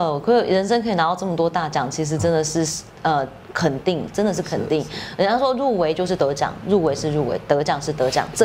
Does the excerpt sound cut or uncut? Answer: cut